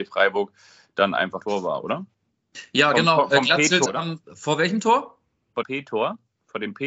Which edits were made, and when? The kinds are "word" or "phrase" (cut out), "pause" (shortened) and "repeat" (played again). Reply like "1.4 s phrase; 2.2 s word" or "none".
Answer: 1.4 s phrase; 3.9 s word; 4.2 s pause; 5.6 s word